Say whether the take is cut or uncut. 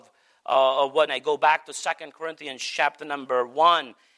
cut